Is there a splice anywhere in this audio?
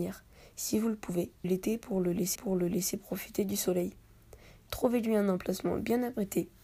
yes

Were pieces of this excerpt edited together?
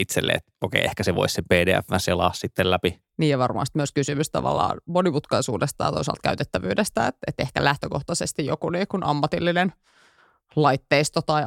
no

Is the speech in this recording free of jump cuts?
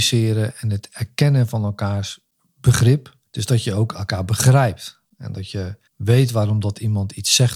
no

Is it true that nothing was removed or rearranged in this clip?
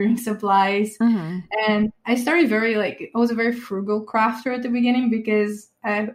yes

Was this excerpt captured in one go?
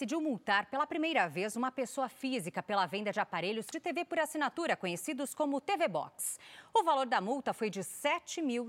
no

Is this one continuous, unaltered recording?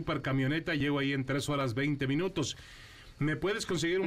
yes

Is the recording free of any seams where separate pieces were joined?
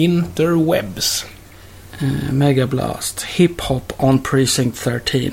yes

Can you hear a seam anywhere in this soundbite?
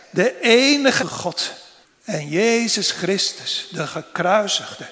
yes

